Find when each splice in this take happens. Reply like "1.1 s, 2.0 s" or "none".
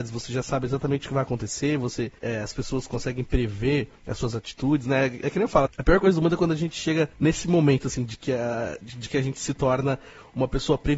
2.2 s, 4.0 s, 7.1 s